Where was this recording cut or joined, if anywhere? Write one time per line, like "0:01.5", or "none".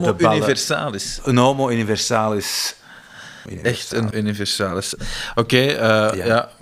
0:03.5
0:04.1